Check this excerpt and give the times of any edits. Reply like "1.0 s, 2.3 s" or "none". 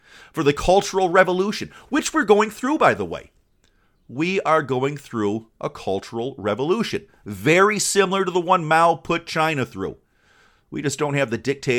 none